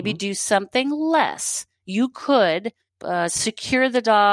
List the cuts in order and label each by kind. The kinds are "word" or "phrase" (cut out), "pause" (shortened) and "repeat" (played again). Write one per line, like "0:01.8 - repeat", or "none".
0:02.9 - pause